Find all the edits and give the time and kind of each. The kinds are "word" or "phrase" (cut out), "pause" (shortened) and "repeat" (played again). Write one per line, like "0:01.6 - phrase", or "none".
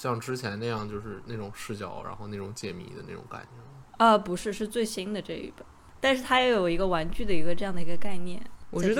0:03.9 - pause